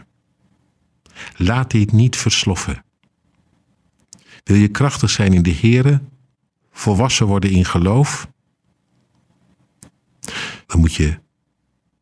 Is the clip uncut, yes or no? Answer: no